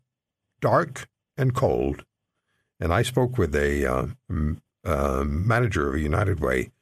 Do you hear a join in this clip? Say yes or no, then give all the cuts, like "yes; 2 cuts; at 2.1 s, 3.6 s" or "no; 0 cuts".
no; 0 cuts